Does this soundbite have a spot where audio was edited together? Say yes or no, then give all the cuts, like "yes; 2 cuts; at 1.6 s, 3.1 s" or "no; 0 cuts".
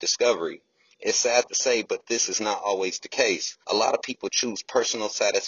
yes; 1 cut; at 3.6 s